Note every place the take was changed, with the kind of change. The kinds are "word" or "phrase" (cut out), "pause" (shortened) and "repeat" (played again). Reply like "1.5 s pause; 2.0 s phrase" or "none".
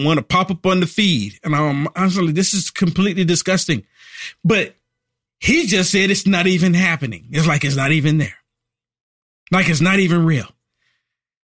none